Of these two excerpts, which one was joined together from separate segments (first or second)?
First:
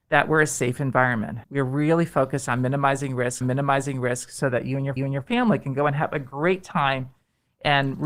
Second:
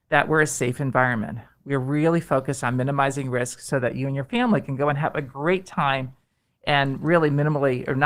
first